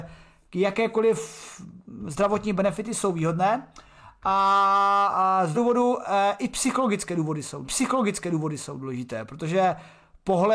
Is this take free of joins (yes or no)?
no